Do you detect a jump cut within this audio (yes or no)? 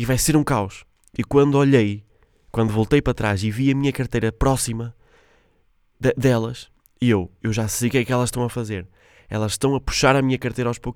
no